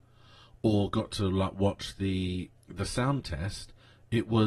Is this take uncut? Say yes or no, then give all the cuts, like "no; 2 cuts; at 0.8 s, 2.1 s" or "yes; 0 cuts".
no; 1 cut; at 2.6 s